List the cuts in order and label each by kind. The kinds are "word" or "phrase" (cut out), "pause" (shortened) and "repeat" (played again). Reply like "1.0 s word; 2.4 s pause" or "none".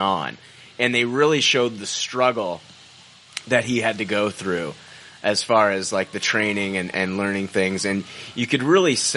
6.9 s word